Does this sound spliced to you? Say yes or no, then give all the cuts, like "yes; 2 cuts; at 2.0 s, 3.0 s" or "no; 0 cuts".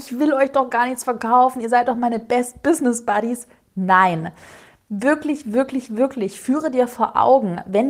no; 0 cuts